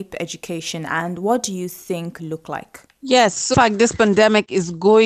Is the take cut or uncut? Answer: cut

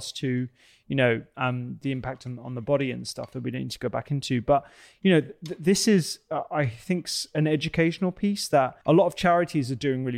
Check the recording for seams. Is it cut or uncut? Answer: cut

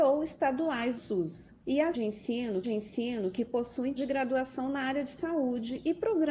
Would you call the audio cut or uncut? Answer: cut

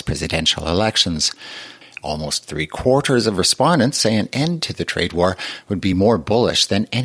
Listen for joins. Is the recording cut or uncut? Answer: uncut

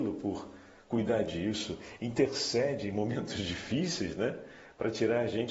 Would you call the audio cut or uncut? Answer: uncut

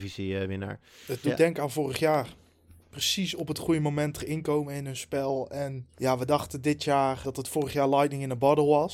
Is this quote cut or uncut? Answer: cut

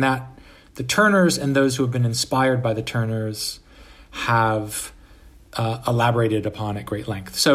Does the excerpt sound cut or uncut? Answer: uncut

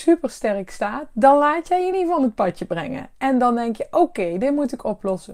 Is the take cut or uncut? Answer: uncut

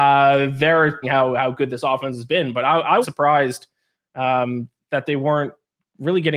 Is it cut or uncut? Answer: cut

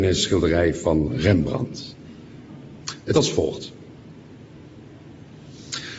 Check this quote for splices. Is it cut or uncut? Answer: cut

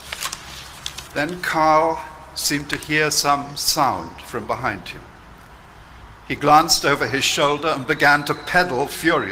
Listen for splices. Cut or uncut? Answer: uncut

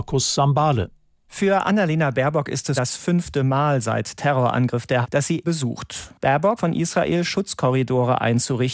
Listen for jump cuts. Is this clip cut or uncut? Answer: cut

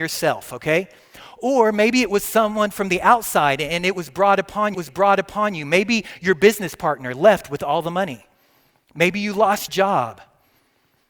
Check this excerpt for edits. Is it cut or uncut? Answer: cut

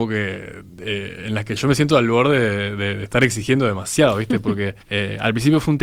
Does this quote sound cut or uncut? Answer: cut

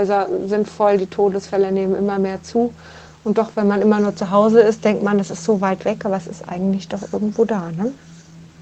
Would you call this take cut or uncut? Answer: uncut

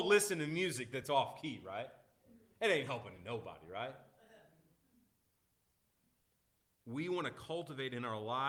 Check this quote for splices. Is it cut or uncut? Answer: uncut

